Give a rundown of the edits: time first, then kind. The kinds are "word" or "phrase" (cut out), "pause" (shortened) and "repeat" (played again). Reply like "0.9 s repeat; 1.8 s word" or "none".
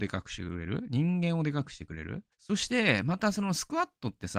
2.3 s pause